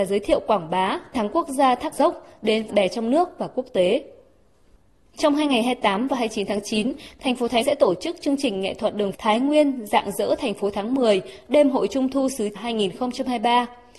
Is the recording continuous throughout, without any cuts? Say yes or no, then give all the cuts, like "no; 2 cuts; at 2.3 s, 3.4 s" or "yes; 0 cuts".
no; 6 cuts; at 1.1 s, 1.9 s, 2.7 s, 7.6 s, 9.1 s, 12.6 s